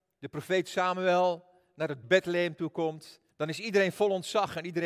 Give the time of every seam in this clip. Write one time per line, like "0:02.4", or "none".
0:02.0
0:03.3